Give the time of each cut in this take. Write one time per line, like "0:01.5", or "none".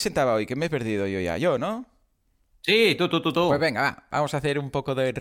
none